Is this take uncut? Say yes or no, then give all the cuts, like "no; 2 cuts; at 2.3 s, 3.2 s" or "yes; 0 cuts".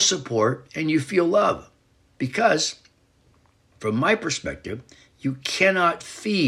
yes; 0 cuts